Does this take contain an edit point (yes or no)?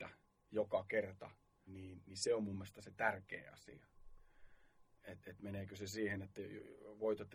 yes